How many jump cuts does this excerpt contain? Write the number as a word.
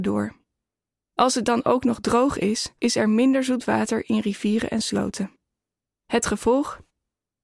one